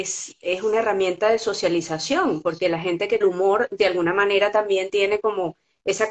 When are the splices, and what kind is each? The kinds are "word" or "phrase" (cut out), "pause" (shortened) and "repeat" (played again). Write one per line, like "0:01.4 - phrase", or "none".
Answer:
0:03.2 - phrase